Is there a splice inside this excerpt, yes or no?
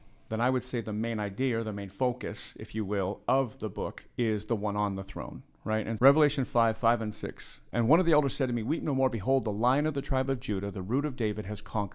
yes